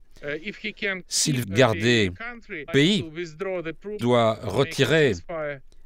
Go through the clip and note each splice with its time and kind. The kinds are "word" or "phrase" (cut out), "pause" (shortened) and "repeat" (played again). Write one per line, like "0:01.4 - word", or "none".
0:01.4 - word
0:02.7 - word
0:04.0 - word